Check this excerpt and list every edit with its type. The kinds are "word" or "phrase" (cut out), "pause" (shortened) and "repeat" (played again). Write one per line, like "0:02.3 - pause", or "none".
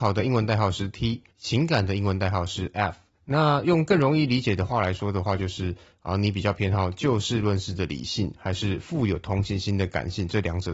0:01.3 - pause
0:03.2 - pause